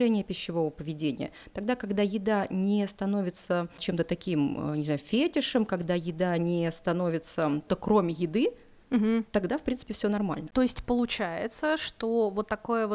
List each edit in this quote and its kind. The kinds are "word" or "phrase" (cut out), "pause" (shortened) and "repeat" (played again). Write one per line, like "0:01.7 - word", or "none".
0:07.7 - word